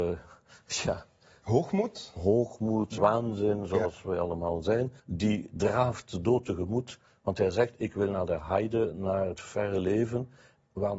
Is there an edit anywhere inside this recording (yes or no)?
yes